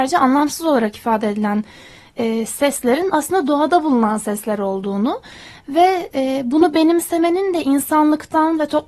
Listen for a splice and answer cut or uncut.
uncut